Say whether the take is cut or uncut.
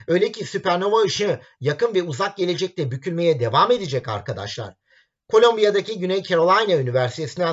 uncut